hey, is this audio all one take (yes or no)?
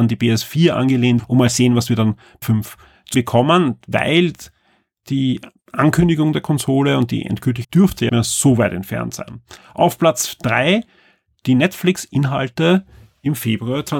no